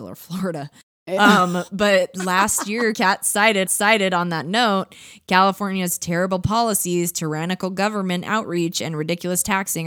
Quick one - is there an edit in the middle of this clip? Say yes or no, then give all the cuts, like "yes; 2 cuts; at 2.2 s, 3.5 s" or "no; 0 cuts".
yes; 2 cuts; at 2.9 s, 3.7 s